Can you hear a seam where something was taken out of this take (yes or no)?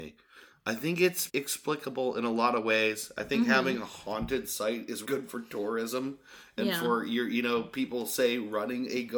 yes